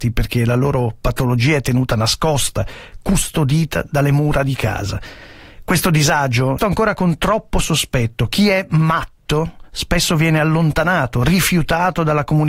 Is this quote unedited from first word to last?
no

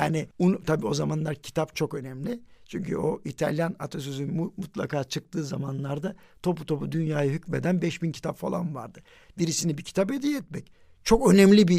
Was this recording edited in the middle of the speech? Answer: no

